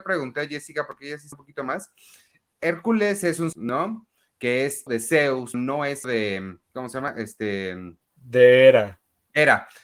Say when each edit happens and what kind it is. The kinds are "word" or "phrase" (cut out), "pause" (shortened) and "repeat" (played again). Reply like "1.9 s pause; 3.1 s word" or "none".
1.3 s word; 3.5 s word; 4.9 s word; 5.5 s word; 6.0 s word; 6.6 s pause